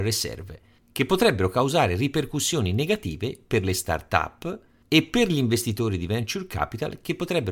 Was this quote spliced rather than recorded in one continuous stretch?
no; 0 cuts

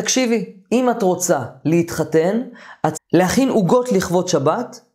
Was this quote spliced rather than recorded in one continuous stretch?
yes; 1 cut; at 2.9 s

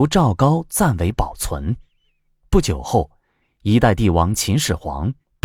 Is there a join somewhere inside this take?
no; 0 cuts

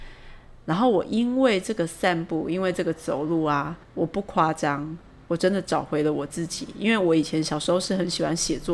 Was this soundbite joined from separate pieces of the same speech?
yes; 1 cut; at 3.8 s

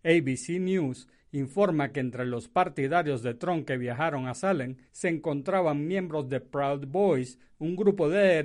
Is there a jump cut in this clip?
yes; 1 cut; at 4.9 s

